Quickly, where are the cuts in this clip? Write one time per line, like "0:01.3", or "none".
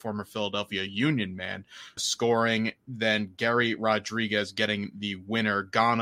0:02.0